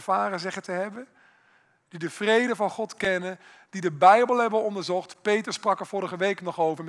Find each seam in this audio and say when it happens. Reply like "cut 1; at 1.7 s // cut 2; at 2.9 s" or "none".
none